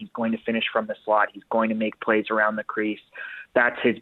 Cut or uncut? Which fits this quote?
uncut